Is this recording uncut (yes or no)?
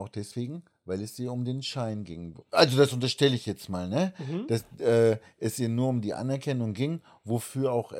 yes